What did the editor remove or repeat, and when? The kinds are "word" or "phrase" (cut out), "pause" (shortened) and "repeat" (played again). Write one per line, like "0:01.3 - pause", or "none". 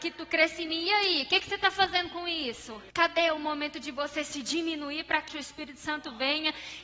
0:02.9 - pause
0:05.3 - word